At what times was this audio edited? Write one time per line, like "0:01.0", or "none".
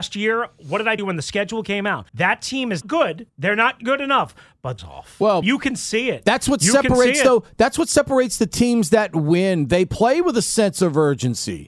0:01.0
0:02.1
0:02.8
0:03.3
0:04.8
0:05.4